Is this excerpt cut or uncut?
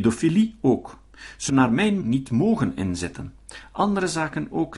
cut